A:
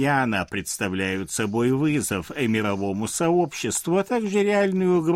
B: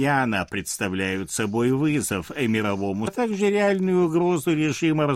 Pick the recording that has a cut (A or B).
B